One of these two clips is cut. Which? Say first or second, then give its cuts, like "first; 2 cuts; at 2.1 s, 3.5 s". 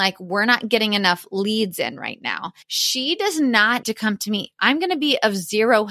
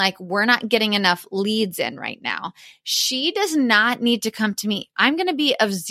first; 2 cuts; at 2.6 s, 3.8 s